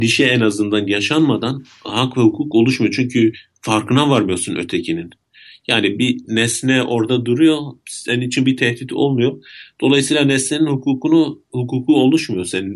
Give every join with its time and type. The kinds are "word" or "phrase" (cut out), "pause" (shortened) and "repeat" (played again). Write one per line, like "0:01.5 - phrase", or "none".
none